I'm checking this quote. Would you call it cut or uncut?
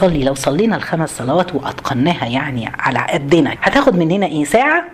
cut